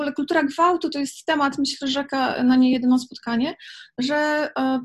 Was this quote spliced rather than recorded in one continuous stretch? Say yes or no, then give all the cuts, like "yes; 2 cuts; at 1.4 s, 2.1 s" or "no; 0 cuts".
no; 0 cuts